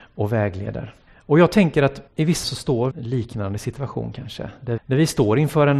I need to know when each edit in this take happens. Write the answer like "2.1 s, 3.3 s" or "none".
1.1 s, 2.1 s, 2.4 s, 2.9 s, 4.8 s